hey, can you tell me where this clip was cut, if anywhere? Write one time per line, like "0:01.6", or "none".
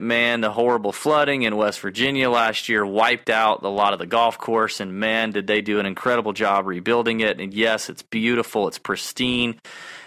none